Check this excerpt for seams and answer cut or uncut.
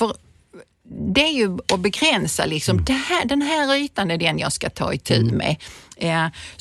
uncut